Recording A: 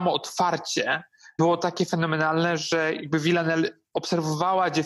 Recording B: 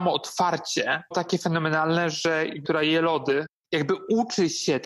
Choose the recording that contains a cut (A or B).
B